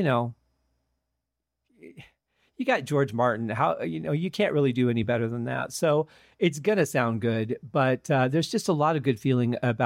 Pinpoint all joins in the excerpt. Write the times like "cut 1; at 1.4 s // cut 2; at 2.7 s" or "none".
none

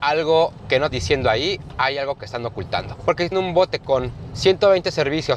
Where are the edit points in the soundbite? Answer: cut 1; at 0.9 s // cut 2; at 3.3 s

